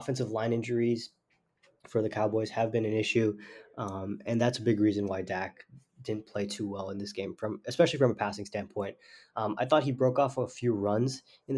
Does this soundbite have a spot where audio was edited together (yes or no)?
no